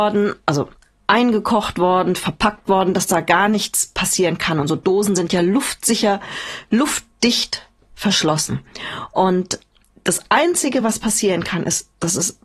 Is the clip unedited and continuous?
yes; 0 cuts

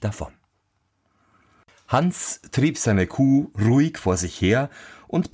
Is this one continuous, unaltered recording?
yes; 0 cuts

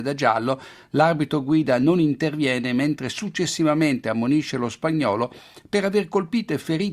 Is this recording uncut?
yes; 0 cuts

